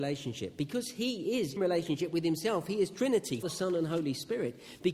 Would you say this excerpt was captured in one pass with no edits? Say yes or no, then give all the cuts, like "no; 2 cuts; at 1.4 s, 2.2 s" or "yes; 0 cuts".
no; 2 cuts; at 1.6 s, 3.4 s